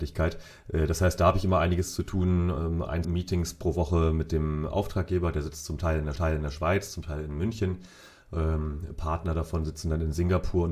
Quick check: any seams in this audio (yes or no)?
yes